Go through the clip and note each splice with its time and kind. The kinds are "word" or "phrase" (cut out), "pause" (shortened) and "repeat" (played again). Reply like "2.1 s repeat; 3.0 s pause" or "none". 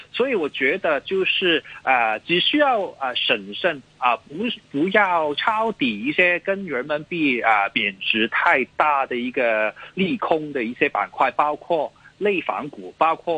none